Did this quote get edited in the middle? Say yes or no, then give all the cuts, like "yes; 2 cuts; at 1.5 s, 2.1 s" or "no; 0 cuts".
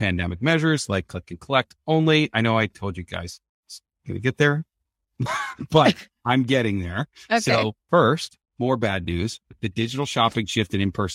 no; 0 cuts